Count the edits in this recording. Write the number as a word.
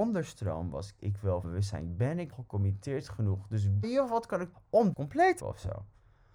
seven